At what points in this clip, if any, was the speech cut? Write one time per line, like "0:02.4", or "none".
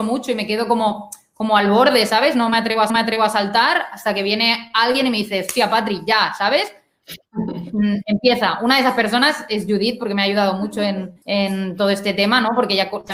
0:02.9
0:11.2